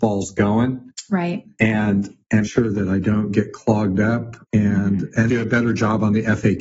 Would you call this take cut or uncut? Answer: cut